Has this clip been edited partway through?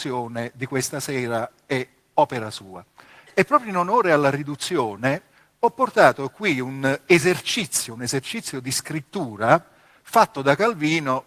no; 0 cuts

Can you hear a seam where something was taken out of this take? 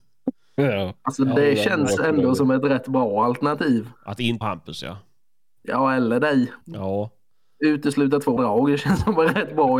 yes; 4 cuts; at 4.0 s, 4.4 s, 6.6 s, 8.4 s

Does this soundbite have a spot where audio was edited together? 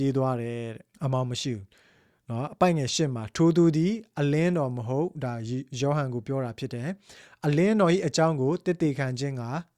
yes; 1 cut; at 0.9 s

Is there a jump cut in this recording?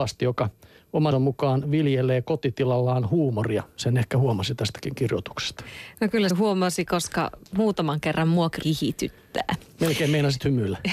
yes; 3 cuts; at 1.1 s, 6.3 s, 8.6 s

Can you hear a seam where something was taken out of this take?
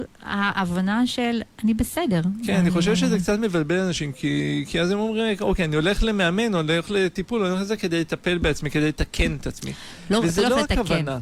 no; 0 cuts

